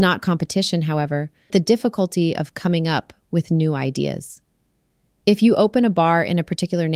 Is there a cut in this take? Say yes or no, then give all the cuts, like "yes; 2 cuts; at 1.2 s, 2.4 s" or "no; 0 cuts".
yes; 1 cut; at 1.5 s